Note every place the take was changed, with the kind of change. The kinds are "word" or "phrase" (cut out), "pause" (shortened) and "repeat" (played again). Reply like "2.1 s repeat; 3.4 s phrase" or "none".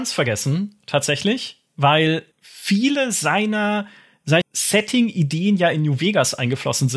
2.3 s pause; 4.4 s phrase

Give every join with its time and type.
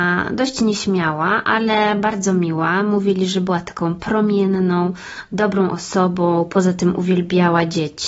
none

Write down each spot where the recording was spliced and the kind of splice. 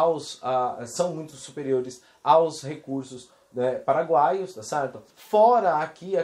5.1 s pause

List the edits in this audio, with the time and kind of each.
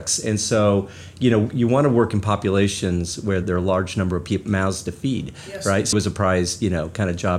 3.4 s word; 5.9 s word

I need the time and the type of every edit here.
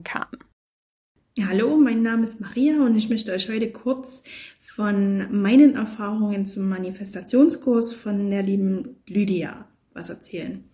none

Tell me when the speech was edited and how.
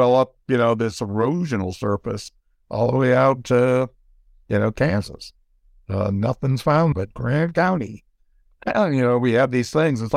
6.9 s word

